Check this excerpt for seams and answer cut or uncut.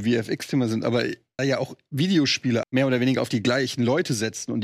cut